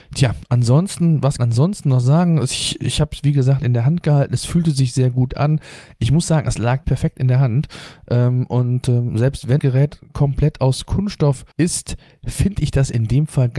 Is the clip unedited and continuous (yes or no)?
no